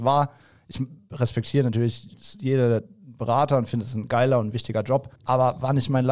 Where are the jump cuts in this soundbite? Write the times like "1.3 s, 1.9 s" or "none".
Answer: 5.2 s